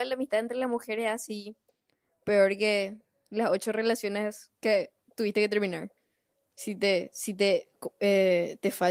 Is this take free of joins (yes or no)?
yes